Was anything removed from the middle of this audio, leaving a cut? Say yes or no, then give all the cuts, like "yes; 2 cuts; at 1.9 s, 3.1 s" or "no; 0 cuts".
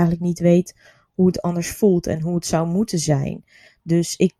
no; 0 cuts